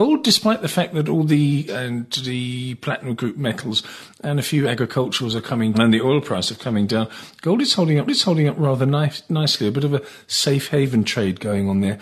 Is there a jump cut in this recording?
yes; 4 cuts; at 1.7 s, 5.7 s, 6.6 s, 8.1 s

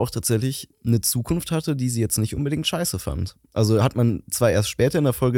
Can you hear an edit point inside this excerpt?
no; 0 cuts

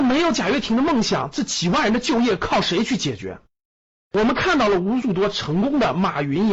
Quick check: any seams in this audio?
no; 0 cuts

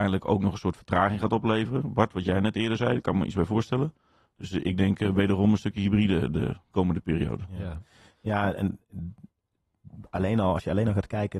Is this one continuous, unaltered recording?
yes; 0 cuts

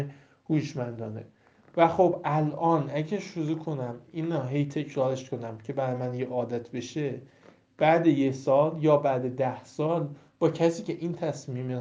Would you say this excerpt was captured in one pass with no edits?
yes; 0 cuts

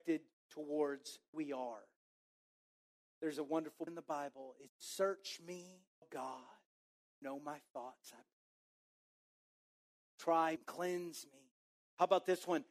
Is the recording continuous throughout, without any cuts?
no; 6 cuts; at 1.3 s, 3.9 s, 4.7 s, 6.0 s, 7.2 s, 10.6 s

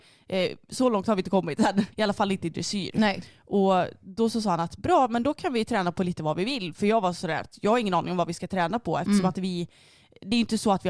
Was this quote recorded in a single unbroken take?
no; 1 cut; at 1.9 s

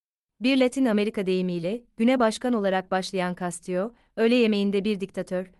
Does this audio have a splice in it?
no; 0 cuts

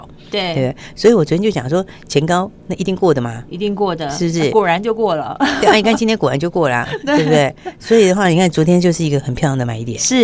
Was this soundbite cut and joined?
no; 0 cuts

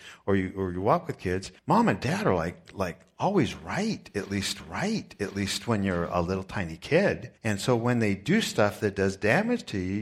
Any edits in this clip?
yes; 3 cuts; at 1.6 s, 4.6 s, 7.4 s

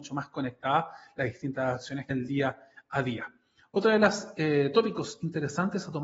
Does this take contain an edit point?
yes; 1 cut; at 2.1 s

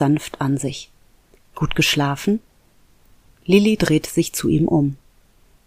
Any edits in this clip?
no; 0 cuts

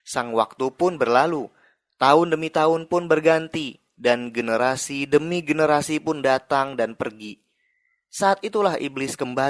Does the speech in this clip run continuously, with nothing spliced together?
yes; 0 cuts

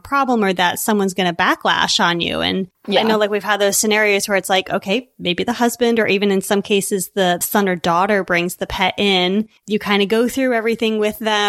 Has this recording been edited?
yes; 2 cuts; at 2.7 s, 9.6 s

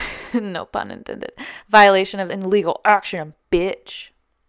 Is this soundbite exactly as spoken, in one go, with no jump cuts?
no; 1 cut; at 2.3 s

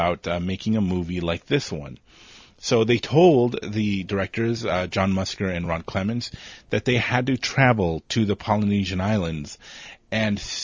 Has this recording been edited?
no; 0 cuts

